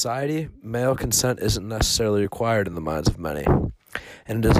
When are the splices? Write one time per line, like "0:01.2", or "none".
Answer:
none